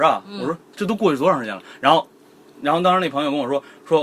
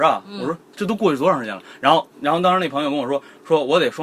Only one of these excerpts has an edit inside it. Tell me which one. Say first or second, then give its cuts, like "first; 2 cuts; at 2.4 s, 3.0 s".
second; 1 cut; at 2.1 s